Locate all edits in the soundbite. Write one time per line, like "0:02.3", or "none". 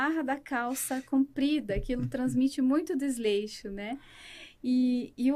none